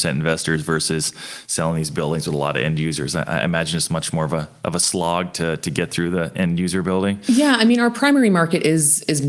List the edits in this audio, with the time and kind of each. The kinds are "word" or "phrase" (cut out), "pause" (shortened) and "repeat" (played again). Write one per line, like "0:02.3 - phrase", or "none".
none